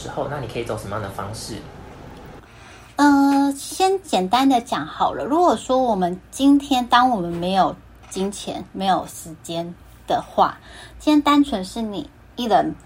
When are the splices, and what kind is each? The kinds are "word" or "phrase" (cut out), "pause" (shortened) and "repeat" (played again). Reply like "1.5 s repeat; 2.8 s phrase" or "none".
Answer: 8.7 s pause